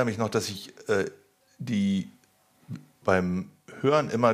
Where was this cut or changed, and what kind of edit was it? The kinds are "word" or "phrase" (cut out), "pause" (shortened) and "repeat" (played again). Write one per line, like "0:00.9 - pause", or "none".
0:03.0 - word

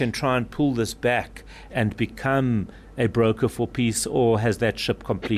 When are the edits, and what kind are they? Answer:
0:01.7 - word

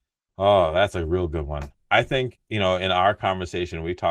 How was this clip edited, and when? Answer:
none

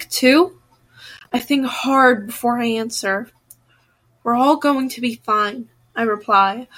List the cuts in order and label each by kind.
none

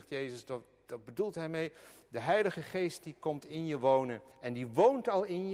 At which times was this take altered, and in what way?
0:04.3 - pause

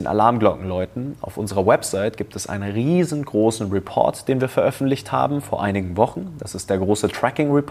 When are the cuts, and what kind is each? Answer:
none

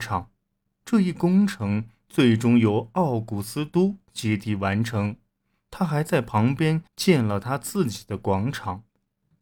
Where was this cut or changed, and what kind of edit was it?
0:06.9 - pause

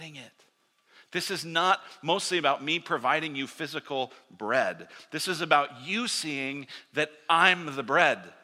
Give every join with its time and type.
none

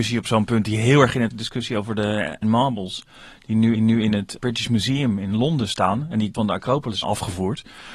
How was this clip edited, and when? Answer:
0:01.3 - phrase
0:02.4 - word
0:03.8 - repeat
0:04.4 - word
0:06.3 - phrase
0:07.0 - word

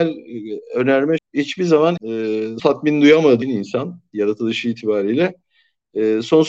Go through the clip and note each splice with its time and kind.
0:01.2 - word
0:02.0 - word
0:02.6 - word
0:03.4 - word

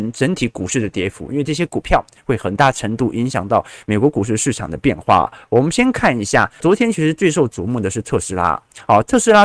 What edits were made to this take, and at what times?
0:06.6 - word

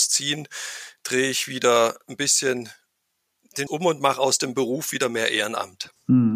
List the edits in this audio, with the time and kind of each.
0:03.7 - word

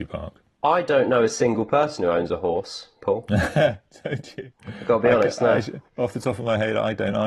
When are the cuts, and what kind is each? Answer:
0:05.9 - pause

